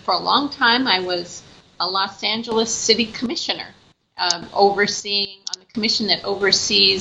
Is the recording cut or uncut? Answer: uncut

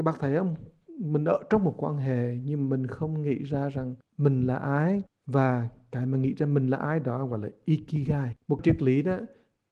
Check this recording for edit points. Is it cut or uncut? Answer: cut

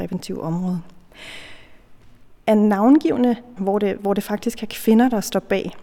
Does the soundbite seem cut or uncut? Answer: cut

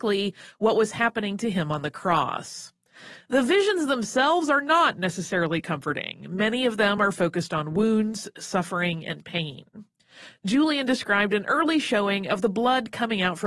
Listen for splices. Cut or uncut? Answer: uncut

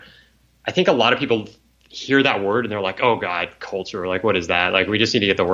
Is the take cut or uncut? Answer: uncut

